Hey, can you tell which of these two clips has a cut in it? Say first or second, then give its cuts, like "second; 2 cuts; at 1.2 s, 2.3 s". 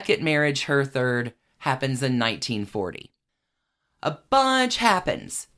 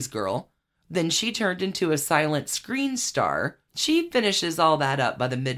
second; 1 cut; at 3.7 s